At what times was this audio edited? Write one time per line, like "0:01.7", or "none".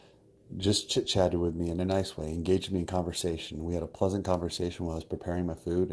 none